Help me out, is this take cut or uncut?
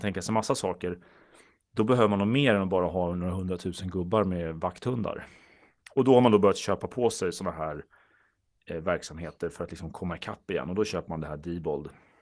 uncut